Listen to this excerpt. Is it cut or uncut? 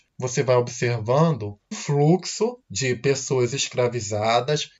cut